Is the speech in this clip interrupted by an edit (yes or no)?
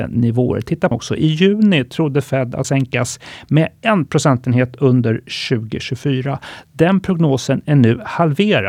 yes